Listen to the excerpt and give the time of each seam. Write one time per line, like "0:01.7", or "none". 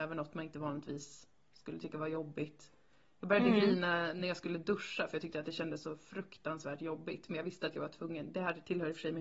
none